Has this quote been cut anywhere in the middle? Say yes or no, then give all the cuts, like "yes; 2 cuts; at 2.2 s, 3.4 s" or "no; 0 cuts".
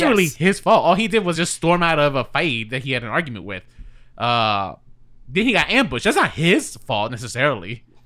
no; 0 cuts